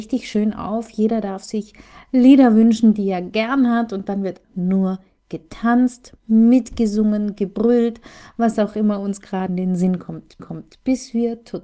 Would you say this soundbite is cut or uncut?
cut